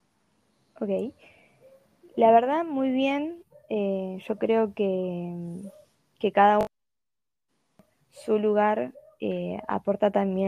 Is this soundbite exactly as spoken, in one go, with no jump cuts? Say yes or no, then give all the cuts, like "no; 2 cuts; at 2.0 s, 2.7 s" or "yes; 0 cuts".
yes; 0 cuts